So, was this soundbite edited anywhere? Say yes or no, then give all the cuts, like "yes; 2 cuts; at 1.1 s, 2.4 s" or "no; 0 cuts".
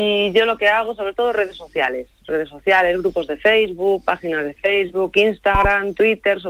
no; 0 cuts